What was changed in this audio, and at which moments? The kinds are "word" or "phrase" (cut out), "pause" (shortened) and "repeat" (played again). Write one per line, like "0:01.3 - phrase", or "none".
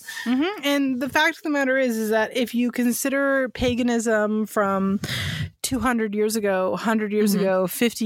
none